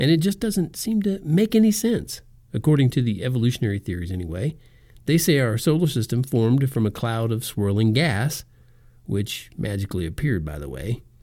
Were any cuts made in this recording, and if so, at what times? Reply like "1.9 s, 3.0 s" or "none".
none